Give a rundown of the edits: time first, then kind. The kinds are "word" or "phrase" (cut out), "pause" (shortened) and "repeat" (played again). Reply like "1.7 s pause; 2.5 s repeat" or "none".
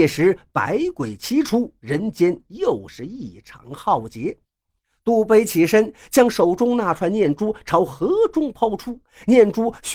none